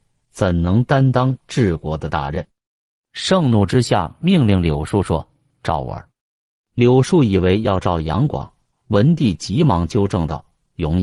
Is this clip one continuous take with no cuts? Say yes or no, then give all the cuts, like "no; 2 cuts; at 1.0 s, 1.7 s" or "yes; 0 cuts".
yes; 0 cuts